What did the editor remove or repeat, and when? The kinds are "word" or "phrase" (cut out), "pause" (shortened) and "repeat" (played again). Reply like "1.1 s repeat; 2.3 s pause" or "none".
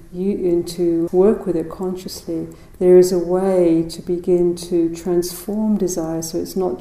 1.1 s word